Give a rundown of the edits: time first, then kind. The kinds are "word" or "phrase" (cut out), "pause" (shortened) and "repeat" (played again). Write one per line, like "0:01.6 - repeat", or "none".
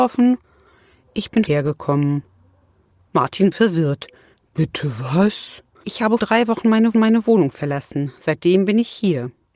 0:01.5 - word
0:03.5 - word
0:06.2 - word
0:06.9 - repeat